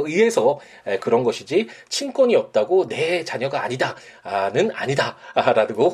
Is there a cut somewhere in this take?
no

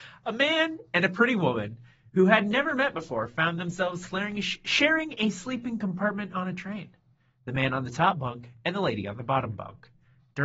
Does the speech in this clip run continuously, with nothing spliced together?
yes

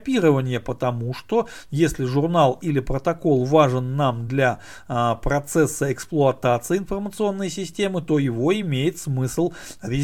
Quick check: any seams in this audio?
no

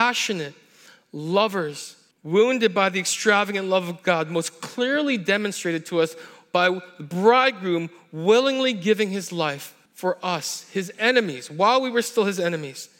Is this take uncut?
no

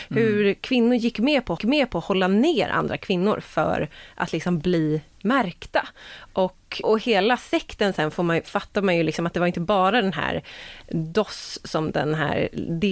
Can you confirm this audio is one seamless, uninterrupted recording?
no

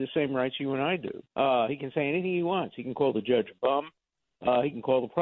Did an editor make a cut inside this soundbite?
yes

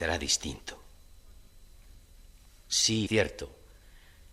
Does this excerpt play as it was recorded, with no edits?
no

